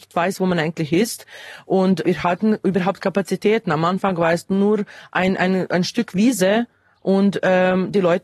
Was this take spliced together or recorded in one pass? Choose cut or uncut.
cut